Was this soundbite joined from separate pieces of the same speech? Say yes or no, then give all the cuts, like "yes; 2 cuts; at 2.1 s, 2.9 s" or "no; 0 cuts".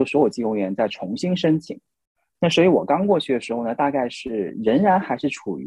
no; 0 cuts